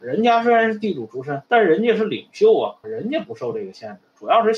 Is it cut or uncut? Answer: cut